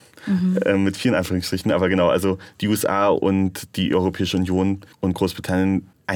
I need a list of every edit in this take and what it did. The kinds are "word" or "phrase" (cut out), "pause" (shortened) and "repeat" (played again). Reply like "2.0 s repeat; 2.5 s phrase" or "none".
4.9 s pause